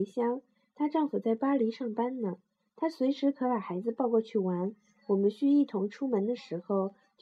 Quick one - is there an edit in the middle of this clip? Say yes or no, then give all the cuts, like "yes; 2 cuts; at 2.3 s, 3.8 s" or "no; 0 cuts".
no; 0 cuts